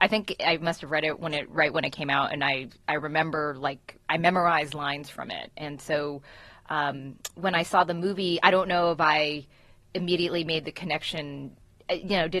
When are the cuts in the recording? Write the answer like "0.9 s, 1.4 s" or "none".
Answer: none